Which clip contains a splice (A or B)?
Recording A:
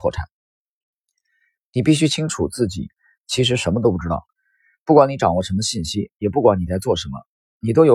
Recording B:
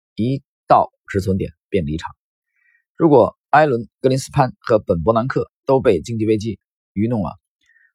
B